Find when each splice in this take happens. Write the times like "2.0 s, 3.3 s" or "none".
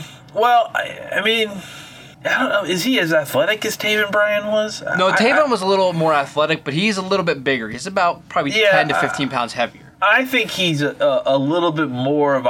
2.1 s, 9.9 s